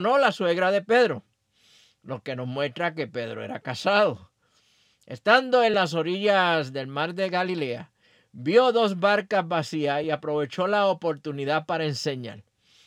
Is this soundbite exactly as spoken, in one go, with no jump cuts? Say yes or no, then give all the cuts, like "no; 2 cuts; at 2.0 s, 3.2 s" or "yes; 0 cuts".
yes; 0 cuts